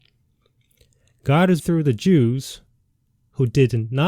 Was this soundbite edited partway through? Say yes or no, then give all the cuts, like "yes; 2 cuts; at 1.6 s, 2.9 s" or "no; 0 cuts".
yes; 1 cut; at 1.6 s